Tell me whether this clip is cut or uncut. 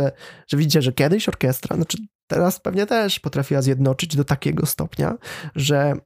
uncut